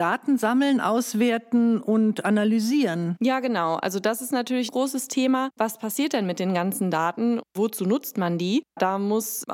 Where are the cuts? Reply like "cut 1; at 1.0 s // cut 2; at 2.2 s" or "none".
cut 1; at 4.7 s